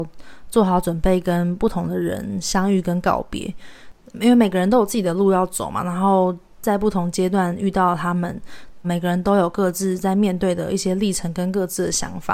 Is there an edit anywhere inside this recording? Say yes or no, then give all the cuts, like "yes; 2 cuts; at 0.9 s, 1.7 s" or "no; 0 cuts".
yes; 1 cut; at 8.8 s